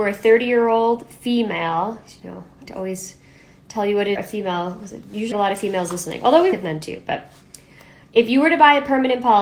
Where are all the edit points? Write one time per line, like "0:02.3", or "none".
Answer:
0:02.7
0:04.2
0:05.3
0:06.5